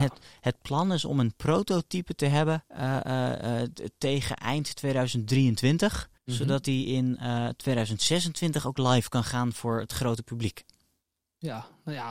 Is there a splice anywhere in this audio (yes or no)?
yes